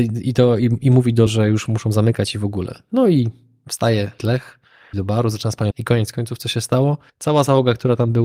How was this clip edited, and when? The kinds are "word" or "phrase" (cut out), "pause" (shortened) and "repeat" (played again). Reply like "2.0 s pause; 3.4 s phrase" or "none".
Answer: 1.3 s word; 4.2 s word; 4.9 s word; 5.7 s word; 7.1 s pause